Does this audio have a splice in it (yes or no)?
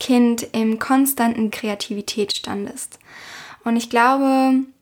yes